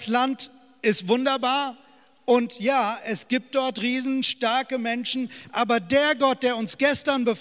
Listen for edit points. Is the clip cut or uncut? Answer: uncut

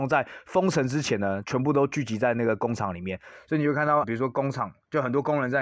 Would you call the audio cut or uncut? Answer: cut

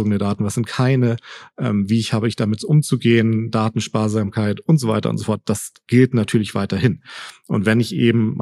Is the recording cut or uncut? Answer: uncut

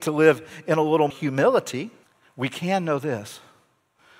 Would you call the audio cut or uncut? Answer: cut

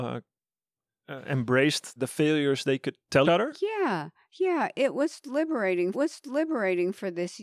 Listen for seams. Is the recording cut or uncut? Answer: cut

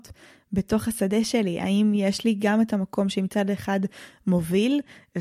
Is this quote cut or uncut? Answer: uncut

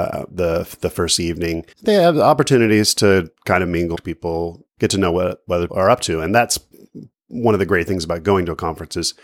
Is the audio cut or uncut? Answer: cut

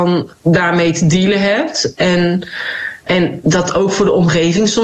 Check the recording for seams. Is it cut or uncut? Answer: cut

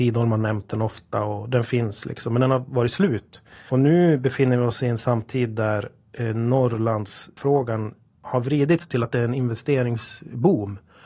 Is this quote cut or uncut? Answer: uncut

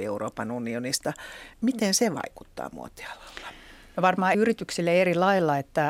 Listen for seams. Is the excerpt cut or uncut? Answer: cut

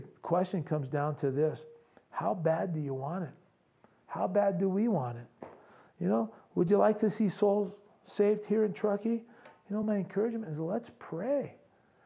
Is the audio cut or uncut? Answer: uncut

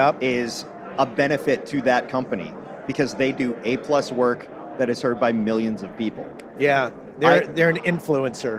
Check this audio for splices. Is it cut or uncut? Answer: uncut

